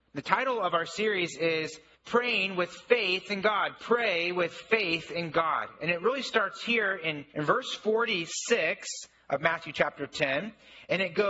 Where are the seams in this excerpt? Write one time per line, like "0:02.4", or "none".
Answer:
0:01.9
0:07.3